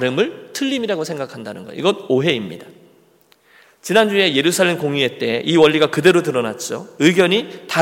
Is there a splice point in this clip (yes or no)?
no